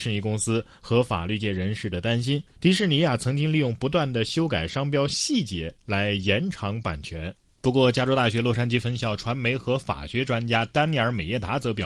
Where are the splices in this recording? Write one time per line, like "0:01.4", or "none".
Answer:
0:02.5